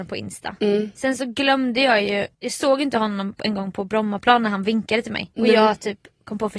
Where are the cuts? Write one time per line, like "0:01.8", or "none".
0:02.3
0:05.3